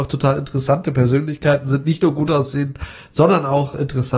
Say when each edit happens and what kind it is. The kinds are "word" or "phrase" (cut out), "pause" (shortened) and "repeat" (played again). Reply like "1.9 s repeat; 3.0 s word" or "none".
none